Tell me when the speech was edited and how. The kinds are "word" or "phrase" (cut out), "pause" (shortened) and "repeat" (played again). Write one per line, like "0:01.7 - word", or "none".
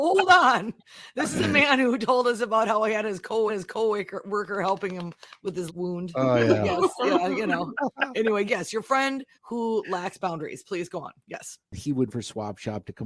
0:03.5 - repeat
0:05.7 - word
0:08.5 - word
0:09.3 - pause
0:12.1 - word